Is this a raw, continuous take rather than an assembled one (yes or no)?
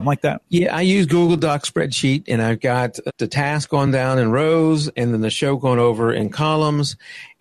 no